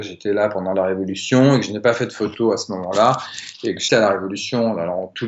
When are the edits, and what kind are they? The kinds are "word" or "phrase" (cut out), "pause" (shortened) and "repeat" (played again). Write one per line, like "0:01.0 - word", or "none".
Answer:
0:03.9 - word